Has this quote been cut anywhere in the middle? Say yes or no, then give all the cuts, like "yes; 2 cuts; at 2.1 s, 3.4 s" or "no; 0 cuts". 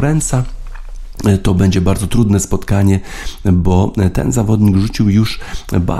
no; 0 cuts